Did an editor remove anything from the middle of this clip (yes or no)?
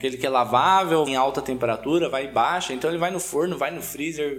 yes